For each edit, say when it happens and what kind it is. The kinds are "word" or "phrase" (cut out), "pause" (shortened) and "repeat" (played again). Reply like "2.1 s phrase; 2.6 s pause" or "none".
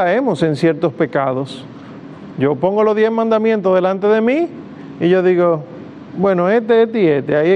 none